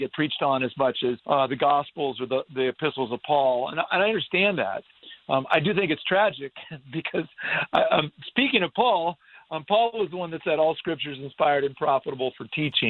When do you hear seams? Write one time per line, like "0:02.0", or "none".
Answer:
0:01.2